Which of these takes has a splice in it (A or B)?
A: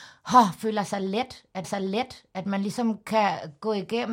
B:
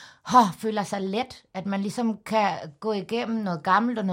A